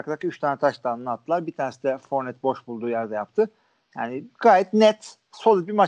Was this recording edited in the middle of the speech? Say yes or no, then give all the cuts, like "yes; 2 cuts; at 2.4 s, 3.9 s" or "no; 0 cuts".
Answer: no; 0 cuts